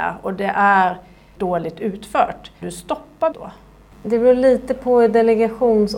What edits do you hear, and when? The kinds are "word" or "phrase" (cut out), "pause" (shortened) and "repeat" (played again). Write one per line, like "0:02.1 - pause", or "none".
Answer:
0:01.4 - word
0:02.6 - word
0:03.3 - word